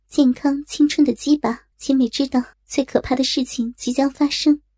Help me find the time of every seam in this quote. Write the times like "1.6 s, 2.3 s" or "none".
1.7 s, 2.5 s